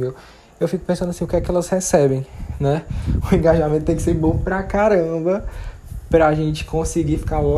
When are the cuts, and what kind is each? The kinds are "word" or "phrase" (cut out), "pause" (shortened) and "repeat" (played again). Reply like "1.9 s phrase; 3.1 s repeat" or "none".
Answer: none